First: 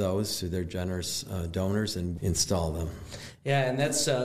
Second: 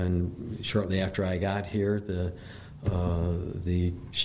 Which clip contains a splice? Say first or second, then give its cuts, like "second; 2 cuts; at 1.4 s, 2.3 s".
first; 1 cut; at 2.2 s